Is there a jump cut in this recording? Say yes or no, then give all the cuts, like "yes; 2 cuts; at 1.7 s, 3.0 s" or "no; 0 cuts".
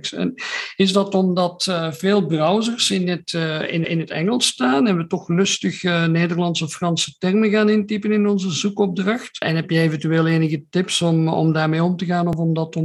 yes; 1 cut; at 3.8 s